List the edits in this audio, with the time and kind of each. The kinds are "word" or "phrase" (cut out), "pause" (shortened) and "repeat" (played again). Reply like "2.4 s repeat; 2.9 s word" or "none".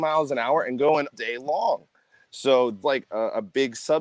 1.1 s word; 2.8 s word